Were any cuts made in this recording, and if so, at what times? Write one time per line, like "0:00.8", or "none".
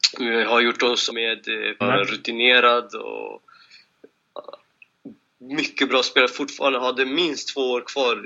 0:01.1
0:01.8